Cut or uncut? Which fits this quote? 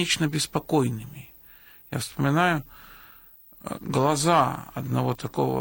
uncut